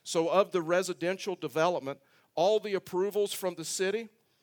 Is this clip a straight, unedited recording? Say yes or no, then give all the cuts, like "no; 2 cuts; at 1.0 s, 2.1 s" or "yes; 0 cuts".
yes; 0 cuts